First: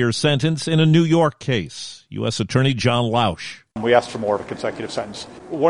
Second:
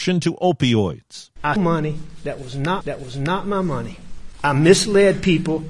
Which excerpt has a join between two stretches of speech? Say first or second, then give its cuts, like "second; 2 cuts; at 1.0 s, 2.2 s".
second; 2 cuts; at 1.6 s, 2.8 s